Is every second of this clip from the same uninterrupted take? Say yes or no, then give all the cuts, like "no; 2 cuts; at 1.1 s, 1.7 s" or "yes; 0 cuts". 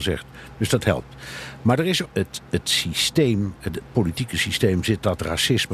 no; 1 cut; at 2.1 s